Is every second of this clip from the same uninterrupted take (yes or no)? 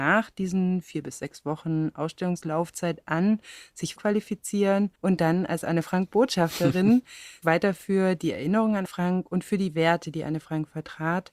no